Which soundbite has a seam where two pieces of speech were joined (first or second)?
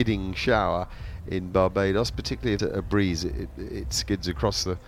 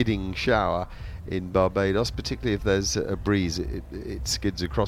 first